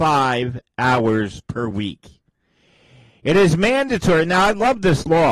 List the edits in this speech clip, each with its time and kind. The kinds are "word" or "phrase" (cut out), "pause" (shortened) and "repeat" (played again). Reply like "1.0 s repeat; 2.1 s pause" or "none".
none